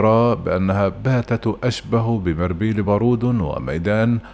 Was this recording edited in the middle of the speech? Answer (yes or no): no